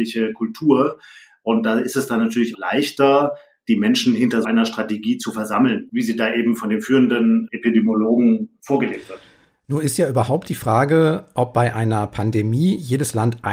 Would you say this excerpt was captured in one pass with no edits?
no; 2 cuts; at 2.5 s, 4.4 s

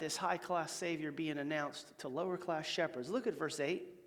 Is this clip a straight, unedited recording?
yes; 0 cuts

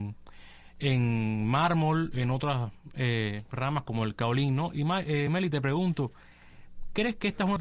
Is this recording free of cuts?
yes; 0 cuts

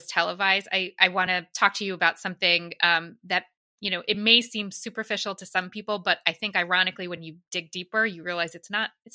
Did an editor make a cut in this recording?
no; 0 cuts

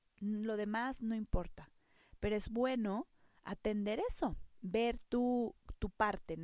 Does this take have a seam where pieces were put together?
no; 0 cuts

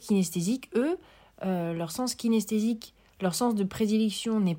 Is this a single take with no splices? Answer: yes; 0 cuts

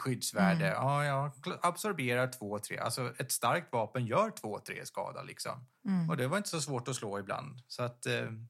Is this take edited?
yes; 1 cut; at 5.8 s

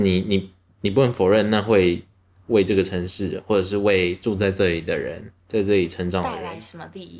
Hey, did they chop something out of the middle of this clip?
no; 0 cuts

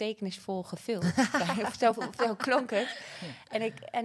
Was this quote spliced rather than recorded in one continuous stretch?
no; 0 cuts

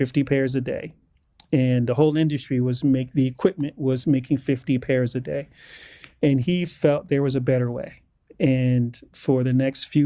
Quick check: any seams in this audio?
no; 0 cuts

